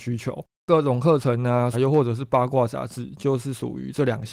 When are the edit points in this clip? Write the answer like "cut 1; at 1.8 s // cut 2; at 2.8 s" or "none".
cut 1; at 1.7 s